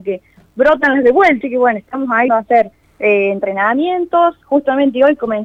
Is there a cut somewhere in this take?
yes; 4 cuts; at 1.0 s, 1.4 s, 2.3 s, 2.8 s

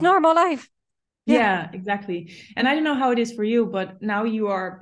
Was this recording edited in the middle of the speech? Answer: no; 0 cuts

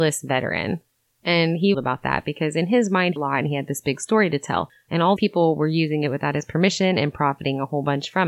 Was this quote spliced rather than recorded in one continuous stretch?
yes; 3 cuts; at 1.7 s, 3.2 s, 5.2 s

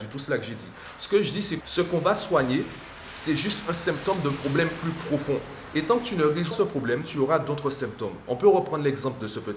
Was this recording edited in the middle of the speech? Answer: yes; 2 cuts; at 1.6 s, 6.5 s

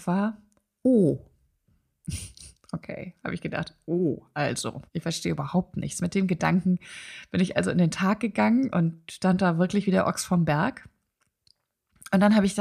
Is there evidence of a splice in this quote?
yes; 1 cut; at 4.9 s

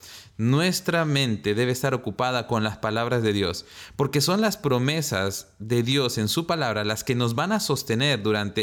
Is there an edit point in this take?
no; 0 cuts

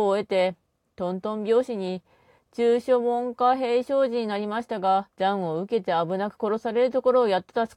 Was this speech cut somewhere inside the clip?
yes; 1 cut; at 5.1 s

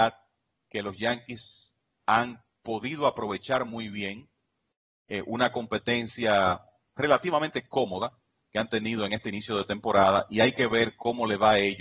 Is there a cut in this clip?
no; 0 cuts

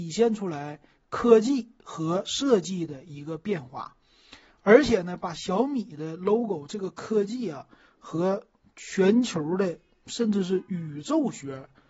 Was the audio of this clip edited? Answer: no; 0 cuts

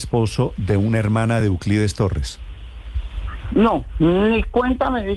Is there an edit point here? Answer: no; 0 cuts

